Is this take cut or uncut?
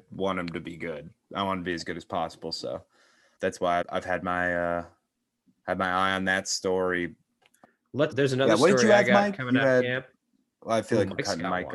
cut